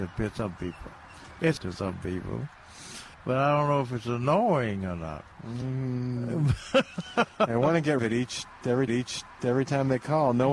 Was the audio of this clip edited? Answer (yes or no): yes